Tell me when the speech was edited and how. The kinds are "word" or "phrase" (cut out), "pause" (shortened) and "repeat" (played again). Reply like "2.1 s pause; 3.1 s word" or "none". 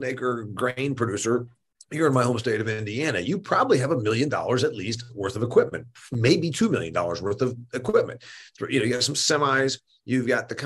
none